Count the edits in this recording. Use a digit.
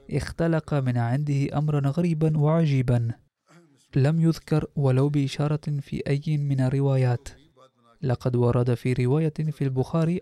0